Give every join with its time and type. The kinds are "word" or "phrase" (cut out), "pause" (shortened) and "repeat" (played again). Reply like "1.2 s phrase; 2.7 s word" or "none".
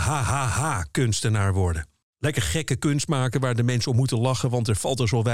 2.0 s pause